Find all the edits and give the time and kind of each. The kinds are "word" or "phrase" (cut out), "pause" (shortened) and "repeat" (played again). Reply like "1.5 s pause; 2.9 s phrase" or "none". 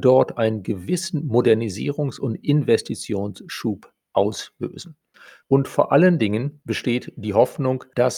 none